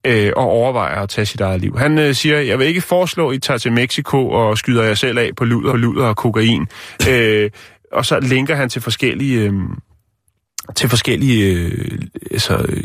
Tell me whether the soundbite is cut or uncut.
cut